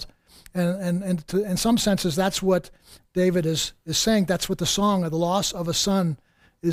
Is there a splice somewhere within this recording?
no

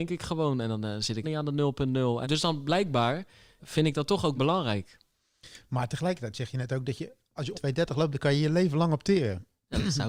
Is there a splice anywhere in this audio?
yes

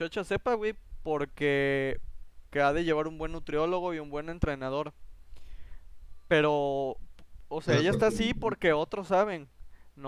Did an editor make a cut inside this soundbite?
yes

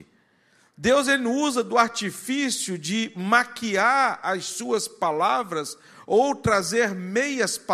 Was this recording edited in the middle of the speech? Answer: no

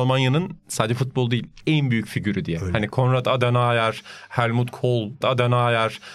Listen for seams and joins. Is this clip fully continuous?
no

